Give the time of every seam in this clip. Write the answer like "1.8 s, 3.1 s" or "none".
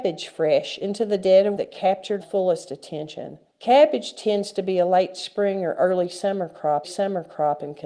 1.6 s, 2.2 s, 3.5 s, 6.8 s